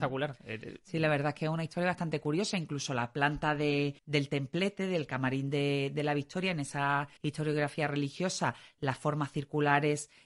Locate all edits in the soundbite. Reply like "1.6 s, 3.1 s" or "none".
4.0 s, 7.2 s